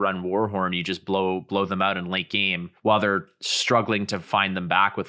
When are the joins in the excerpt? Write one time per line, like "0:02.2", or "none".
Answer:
0:02.8